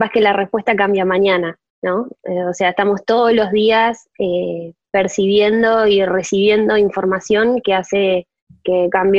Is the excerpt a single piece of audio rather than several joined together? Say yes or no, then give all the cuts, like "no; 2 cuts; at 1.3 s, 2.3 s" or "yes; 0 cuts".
yes; 0 cuts